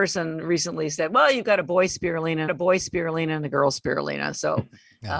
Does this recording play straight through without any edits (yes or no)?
no